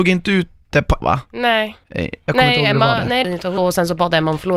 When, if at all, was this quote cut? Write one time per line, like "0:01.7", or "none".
0:01.0
0:01.8
0:03.2
0:03.6

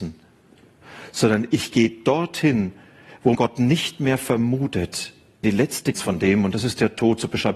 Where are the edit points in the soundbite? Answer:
0:03.3
0:05.4
0:05.9

